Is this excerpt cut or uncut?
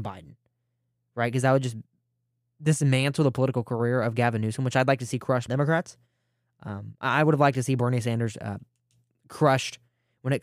cut